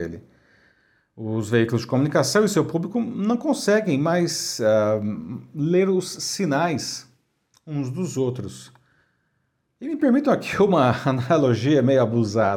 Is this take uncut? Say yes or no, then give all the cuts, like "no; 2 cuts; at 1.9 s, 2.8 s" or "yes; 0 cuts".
yes; 0 cuts